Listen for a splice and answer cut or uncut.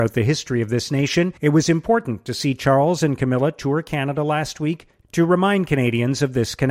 cut